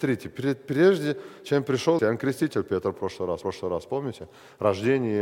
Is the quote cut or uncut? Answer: cut